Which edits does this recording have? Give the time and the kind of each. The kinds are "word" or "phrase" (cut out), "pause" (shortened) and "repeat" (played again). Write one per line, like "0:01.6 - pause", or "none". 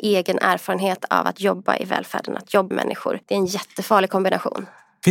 0:02.7 - word
0:03.2 - pause